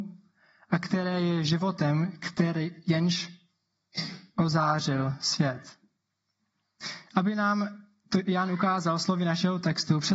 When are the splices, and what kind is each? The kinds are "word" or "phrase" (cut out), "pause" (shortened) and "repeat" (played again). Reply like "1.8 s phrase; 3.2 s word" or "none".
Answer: none